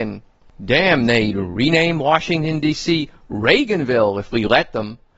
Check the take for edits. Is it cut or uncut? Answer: uncut